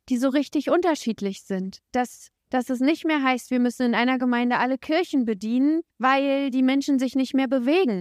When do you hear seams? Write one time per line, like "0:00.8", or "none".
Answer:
0:01.8
0:05.9